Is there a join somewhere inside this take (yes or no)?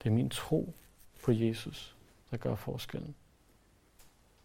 no